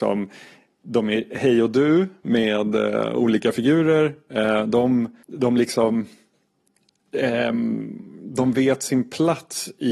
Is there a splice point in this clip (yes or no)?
yes